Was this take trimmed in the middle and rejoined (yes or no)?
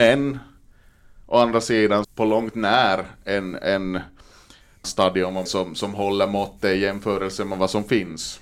yes